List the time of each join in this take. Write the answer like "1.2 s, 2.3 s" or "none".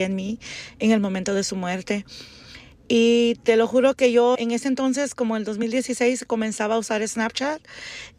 4.3 s